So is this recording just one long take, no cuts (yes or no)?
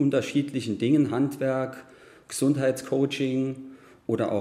yes